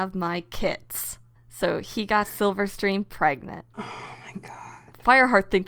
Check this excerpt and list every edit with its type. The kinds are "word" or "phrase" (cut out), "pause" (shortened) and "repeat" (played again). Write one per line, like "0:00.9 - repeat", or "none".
0:01.3 - pause
0:03.7 - pause